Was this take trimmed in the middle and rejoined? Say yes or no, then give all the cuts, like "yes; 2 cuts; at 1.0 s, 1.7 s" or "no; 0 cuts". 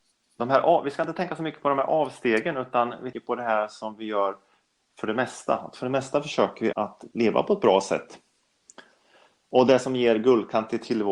yes; 2 cuts; at 3.1 s, 6.7 s